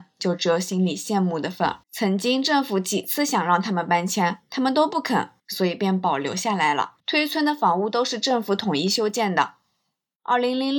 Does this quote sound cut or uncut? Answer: cut